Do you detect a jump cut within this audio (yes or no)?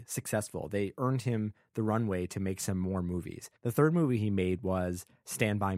yes